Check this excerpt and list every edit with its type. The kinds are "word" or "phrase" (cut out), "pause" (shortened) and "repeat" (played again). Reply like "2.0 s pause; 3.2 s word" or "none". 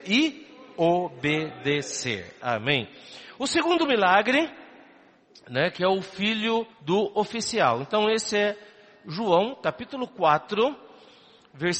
6.7 s pause